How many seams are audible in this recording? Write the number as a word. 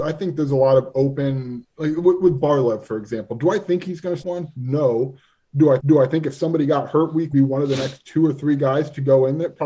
three